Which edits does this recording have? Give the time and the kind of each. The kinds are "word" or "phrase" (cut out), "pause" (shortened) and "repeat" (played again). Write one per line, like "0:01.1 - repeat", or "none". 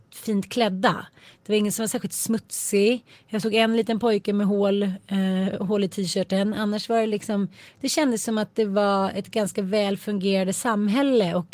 none